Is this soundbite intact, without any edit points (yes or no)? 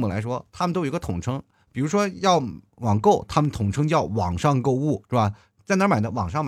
yes